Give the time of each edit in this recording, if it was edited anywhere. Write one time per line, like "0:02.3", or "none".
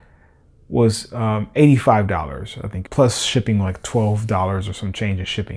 0:02.9